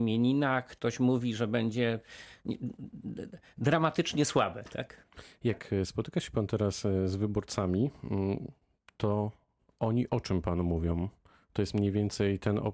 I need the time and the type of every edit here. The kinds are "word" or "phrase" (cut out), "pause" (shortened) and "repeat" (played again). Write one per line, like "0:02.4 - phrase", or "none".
none